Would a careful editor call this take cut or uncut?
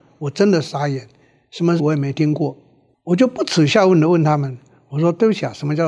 cut